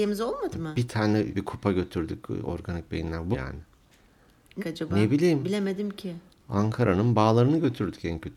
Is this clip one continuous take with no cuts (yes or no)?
no